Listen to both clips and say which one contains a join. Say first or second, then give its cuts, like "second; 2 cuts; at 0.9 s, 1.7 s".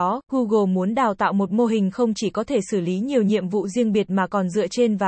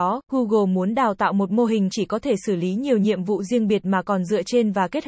second; 1 cut; at 1.9 s